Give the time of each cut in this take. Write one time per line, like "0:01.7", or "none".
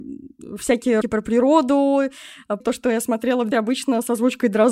0:01.0
0:02.6
0:03.5